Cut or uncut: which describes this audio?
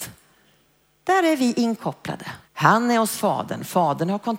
cut